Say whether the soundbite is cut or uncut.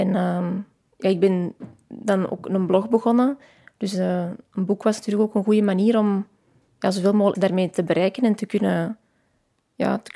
cut